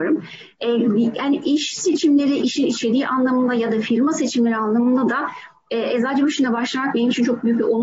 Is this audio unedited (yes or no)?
yes